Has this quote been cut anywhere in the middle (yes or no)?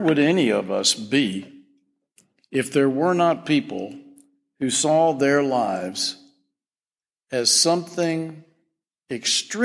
no